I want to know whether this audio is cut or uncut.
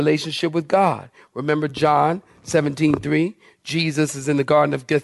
uncut